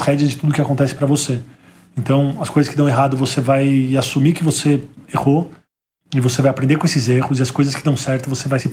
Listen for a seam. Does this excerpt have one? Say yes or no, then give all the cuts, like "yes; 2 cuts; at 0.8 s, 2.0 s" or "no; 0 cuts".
no; 0 cuts